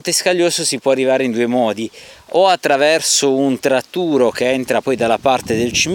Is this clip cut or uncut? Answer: uncut